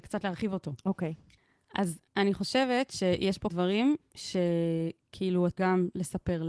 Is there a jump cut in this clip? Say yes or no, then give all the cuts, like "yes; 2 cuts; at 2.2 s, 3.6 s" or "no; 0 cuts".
yes; 2 cuts; at 3.5 s, 5.6 s